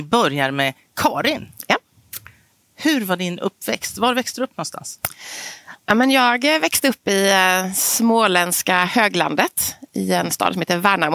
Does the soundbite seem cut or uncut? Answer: uncut